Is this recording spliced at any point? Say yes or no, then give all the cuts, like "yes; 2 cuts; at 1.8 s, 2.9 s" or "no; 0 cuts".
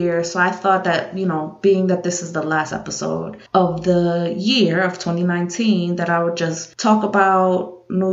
yes; 1 cut; at 3.5 s